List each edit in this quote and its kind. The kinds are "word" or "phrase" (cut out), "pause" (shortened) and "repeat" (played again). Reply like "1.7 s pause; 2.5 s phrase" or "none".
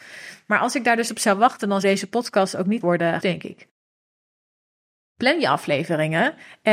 1.1 s word; 1.8 s word; 2.8 s word; 3.2 s word